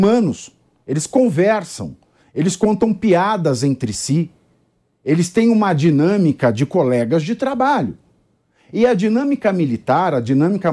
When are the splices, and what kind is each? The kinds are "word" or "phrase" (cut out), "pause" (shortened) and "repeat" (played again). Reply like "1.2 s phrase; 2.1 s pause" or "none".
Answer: none